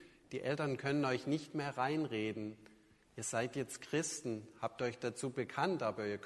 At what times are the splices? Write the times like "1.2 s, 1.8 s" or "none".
none